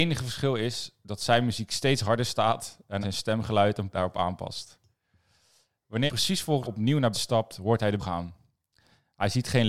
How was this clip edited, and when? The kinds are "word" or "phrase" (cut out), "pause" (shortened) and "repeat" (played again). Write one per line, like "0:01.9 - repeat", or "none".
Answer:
0:03.0 - word
0:03.9 - word
0:06.1 - word
0:06.6 - word
0:07.1 - word
0:08.0 - word

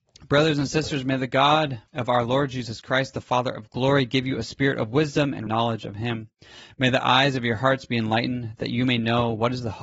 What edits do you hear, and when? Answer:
0:01.9 - pause
0:05.5 - phrase

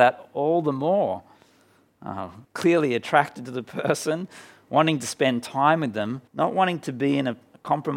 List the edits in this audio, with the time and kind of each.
0:02.4 - pause
0:06.3 - pause

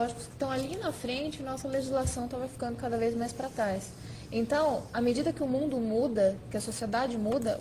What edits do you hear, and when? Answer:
none

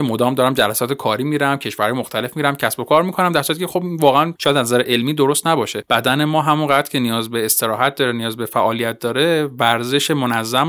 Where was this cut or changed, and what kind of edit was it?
none

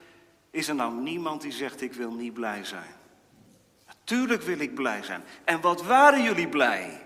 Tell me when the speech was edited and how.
none

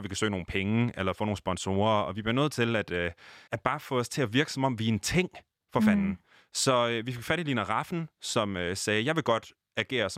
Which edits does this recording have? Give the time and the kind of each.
0:03.5 - word

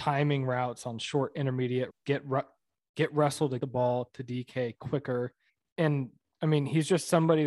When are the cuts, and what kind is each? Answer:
0:01.9 - word
0:03.6 - word
0:05.5 - pause

